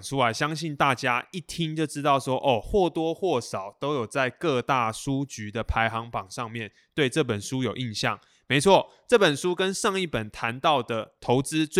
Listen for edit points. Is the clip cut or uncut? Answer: uncut